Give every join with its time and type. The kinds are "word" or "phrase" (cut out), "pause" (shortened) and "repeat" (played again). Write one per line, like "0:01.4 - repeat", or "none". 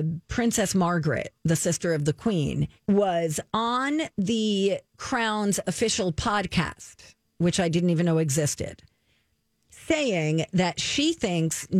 0:01.4 - pause
0:02.8 - pause